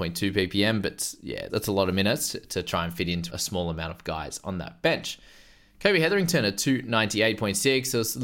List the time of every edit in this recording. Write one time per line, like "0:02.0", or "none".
0:01.5
0:03.3